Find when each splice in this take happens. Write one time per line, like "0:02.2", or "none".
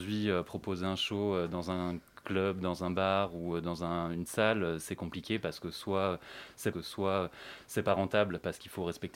0:04.3
0:06.7